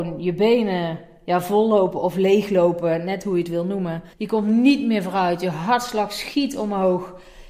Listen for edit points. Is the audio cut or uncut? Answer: cut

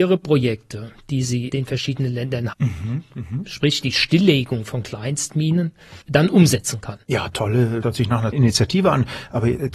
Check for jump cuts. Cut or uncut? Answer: cut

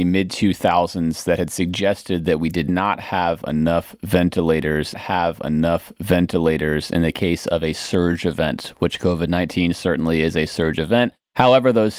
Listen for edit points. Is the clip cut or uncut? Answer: cut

